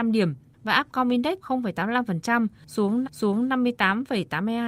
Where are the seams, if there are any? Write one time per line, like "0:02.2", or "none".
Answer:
0:01.4
0:03.0